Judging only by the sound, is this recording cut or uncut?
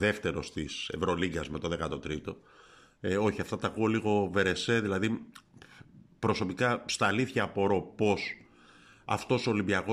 uncut